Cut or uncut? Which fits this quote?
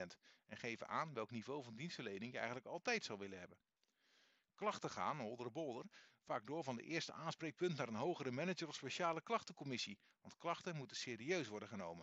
uncut